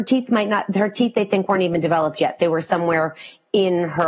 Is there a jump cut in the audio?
no; 0 cuts

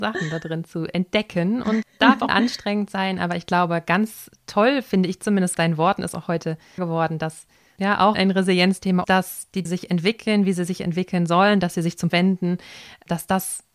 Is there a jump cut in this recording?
yes; 9 cuts; at 1.8 s, 2.3 s, 5.5 s, 6.8 s, 7.8 s, 8.1 s, 9.0 s, 9.7 s, 12.1 s

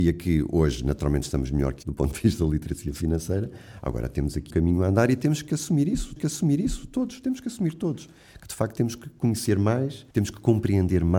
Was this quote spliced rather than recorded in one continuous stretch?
yes; 4 cuts; at 1.8 s, 4.5 s, 6.2 s, 10.1 s

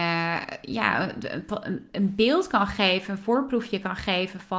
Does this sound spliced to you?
no; 0 cuts

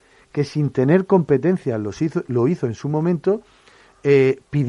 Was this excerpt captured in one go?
yes; 0 cuts

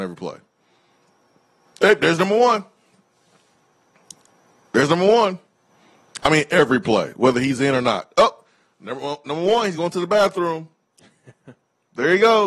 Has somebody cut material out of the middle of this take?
no; 0 cuts

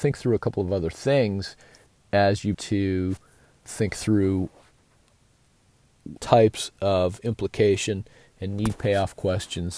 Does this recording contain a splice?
yes; 4 cuts; at 1.9 s, 2.5 s, 3.7 s, 6.2 s

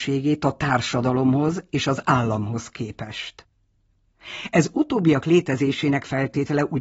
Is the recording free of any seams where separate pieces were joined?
yes; 0 cuts

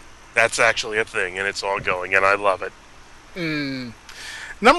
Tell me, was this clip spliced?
no; 0 cuts

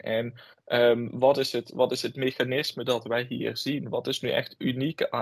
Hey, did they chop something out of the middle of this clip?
no; 0 cuts

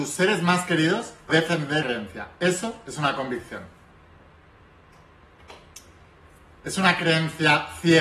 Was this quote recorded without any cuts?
no; 2 cuts; at 1.3 s, 1.8 s

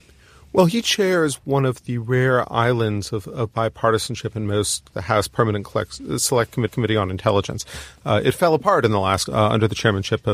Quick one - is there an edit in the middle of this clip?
yes; 3 cuts; at 4.9 s, 6.7 s, 9.3 s

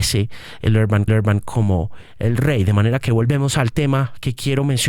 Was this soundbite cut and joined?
yes; 1 cut; at 1.1 s

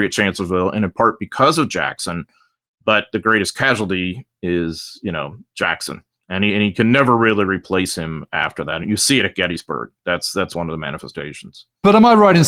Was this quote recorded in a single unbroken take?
yes; 0 cuts

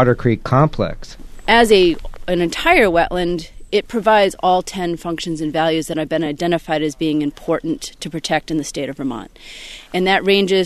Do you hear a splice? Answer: no; 0 cuts

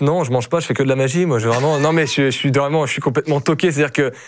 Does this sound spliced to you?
no; 0 cuts

